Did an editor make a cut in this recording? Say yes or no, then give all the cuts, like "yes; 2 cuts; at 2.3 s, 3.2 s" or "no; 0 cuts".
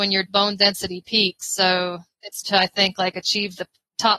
yes; 1 cut; at 2.4 s